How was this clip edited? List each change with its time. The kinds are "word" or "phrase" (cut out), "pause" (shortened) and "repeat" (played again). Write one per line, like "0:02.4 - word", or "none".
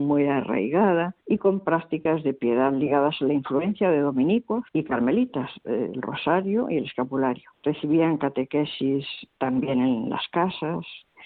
0:01.2 - pause
0:04.7 - pause
0:07.5 - pause